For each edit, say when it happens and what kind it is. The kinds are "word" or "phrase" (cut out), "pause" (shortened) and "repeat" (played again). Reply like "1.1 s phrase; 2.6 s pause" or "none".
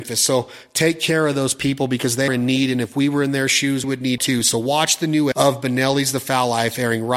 2.3 s word; 3.8 s word; 4.2 s word; 5.3 s word